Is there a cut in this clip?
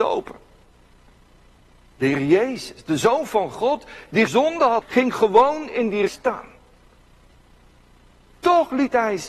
yes; 3 cuts; at 4.3 s, 4.8 s, 6.1 s

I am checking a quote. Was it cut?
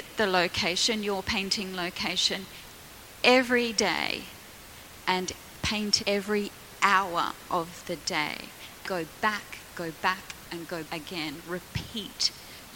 yes; 4 cuts; at 6.0 s, 8.8 s, 9.7 s, 10.8 s

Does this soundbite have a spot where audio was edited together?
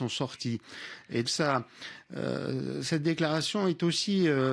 yes; 1 cut; at 1.2 s

